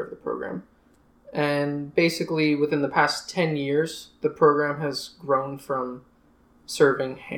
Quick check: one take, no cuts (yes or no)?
yes